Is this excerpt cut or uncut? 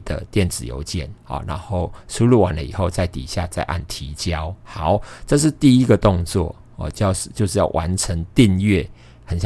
cut